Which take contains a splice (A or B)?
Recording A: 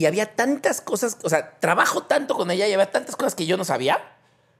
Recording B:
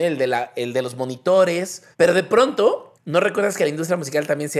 B